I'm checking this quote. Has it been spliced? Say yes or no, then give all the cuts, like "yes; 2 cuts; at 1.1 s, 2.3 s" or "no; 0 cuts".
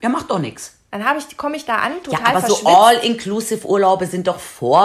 no; 0 cuts